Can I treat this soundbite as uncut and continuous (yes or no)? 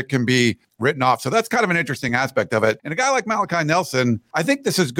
yes